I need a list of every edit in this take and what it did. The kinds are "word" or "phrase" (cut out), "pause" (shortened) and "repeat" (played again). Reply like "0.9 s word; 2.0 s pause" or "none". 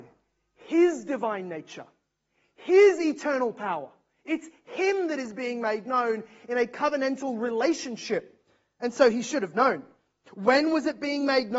none